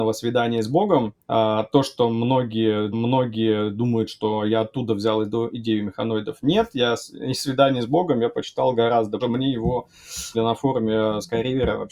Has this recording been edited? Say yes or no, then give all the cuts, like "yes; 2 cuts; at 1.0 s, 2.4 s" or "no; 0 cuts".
yes; 4 cuts; at 1.2 s, 2.9 s, 9.2 s, 10.3 s